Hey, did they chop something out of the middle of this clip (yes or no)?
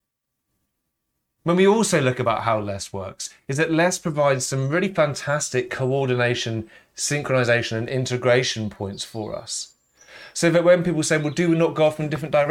no